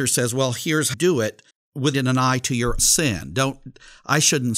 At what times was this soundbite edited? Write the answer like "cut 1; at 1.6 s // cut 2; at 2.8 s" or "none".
cut 1; at 0.9 s // cut 2; at 1.5 s // cut 3; at 1.9 s // cut 4; at 2.8 s